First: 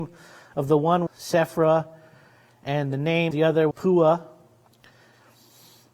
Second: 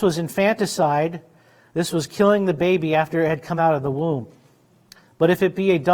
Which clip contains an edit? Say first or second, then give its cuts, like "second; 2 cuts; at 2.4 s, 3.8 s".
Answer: first; 3 cuts; at 1.1 s, 3.3 s, 3.7 s